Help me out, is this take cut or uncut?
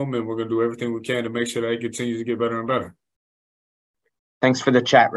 uncut